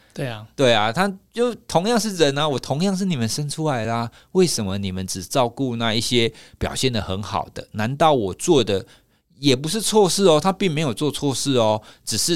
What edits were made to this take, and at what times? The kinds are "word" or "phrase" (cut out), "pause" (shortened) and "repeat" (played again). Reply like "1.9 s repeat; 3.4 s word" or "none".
none